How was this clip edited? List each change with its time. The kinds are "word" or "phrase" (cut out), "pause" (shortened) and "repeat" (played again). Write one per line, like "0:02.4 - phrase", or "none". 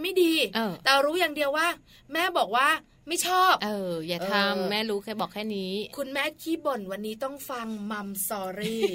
none